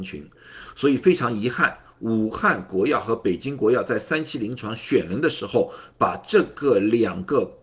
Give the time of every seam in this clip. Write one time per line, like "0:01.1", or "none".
none

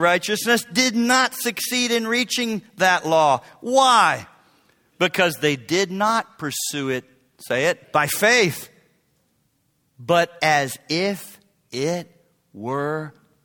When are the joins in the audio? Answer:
0:07.8

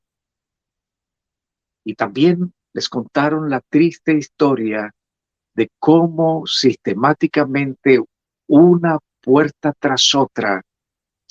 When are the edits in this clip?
0:02.6

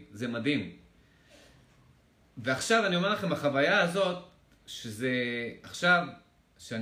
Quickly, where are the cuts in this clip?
none

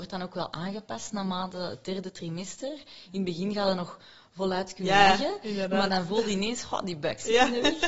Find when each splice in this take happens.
none

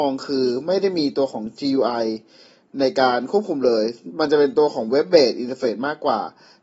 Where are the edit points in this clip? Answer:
none

